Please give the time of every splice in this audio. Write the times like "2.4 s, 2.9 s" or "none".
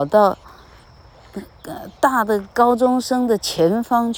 2.0 s